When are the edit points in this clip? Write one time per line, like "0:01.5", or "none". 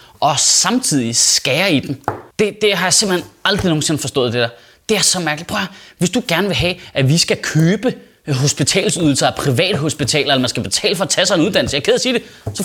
0:02.3